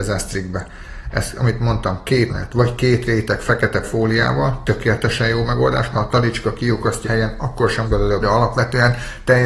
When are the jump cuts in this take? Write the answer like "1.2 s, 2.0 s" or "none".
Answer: 2.3 s, 3.8 s, 5.9 s, 7.0 s, 7.8 s, 8.2 s